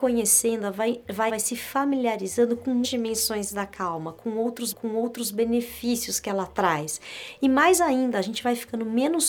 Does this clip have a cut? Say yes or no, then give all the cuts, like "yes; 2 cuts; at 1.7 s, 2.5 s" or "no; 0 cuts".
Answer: yes; 3 cuts; at 1.3 s, 2.8 s, 4.7 s